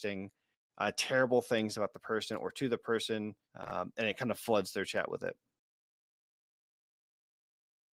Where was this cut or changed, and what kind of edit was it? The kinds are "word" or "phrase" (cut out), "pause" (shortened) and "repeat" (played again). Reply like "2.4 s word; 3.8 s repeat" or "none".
3.4 s pause